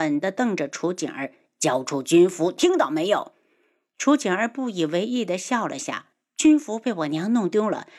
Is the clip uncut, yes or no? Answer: no